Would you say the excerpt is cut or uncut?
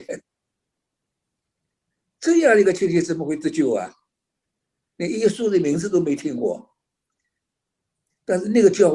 uncut